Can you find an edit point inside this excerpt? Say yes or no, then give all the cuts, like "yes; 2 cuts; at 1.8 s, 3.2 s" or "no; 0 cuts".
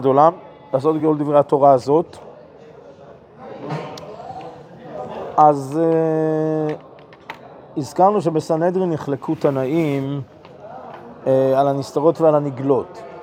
no; 0 cuts